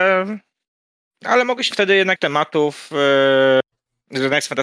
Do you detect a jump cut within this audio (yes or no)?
yes